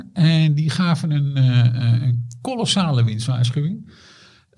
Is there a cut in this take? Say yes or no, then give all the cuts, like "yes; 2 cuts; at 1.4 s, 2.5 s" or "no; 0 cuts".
no; 0 cuts